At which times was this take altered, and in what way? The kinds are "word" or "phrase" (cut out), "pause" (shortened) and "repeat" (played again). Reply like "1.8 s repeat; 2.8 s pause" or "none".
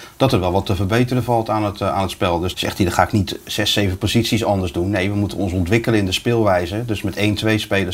2.5 s word